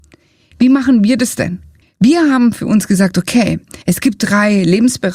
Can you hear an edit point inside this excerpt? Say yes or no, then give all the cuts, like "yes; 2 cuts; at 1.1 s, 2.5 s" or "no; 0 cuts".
yes; 2 cuts; at 1.8 s, 3.8 s